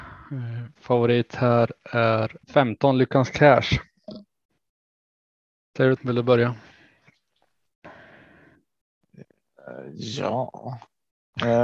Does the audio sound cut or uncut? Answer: cut